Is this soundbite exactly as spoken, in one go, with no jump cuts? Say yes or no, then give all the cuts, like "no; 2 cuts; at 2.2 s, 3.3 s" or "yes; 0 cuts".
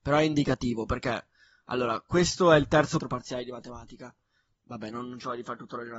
no; 1 cut; at 3.0 s